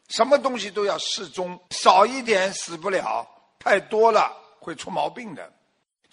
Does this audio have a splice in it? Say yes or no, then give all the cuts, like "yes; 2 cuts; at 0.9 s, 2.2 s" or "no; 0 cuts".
no; 0 cuts